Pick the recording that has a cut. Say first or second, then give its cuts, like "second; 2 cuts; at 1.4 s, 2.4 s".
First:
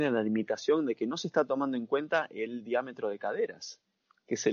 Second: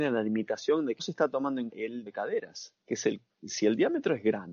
second; 4 cuts; at 1.0 s, 1.7 s, 2.1 s, 2.8 s